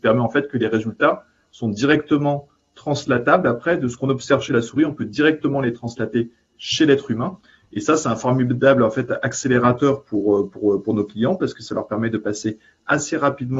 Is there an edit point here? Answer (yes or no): no